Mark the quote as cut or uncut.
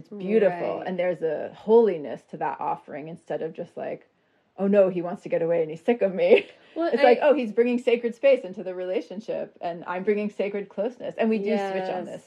uncut